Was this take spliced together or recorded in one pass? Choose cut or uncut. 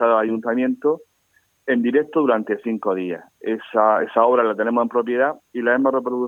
uncut